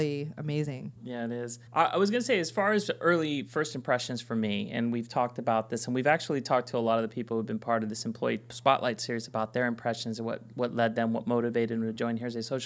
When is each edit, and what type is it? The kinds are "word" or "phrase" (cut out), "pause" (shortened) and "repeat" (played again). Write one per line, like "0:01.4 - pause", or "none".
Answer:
0:01.0 - pause
0:01.7 - pause

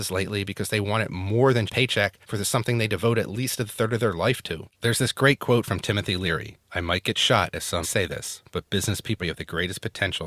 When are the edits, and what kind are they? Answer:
0:01.7 - word
0:02.2 - pause
0:04.7 - pause
0:06.6 - pause
0:07.8 - phrase
0:09.2 - word

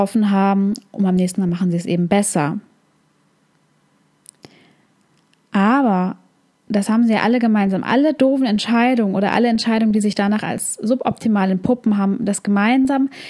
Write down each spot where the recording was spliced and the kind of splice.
none

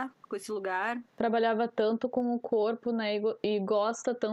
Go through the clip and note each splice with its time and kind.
0:01.1 - pause

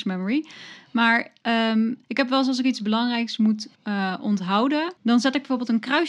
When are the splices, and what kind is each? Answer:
0:02.0 - pause
0:03.7 - pause
0:05.0 - pause

